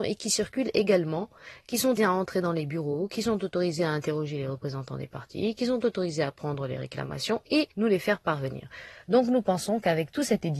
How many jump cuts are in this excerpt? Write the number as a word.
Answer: two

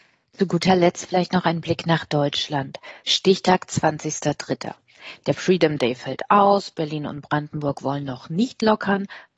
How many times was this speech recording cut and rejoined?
zero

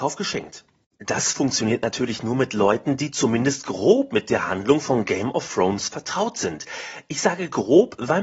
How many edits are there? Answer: zero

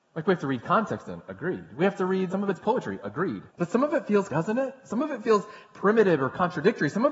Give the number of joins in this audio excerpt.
three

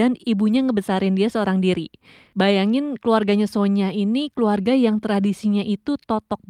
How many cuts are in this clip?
zero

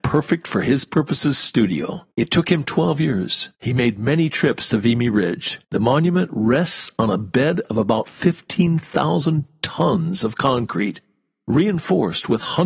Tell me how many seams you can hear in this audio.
three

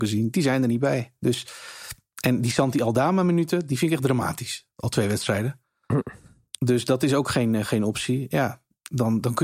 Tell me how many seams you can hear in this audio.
zero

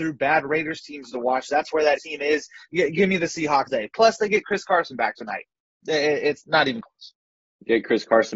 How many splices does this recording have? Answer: three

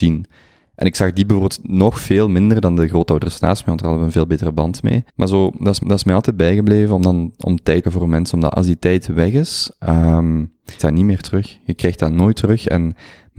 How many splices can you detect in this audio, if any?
four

